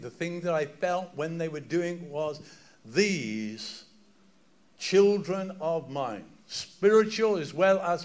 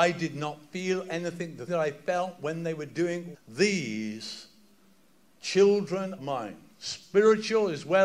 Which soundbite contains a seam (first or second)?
second